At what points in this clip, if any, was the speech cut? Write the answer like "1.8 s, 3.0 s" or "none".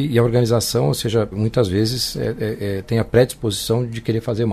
1.3 s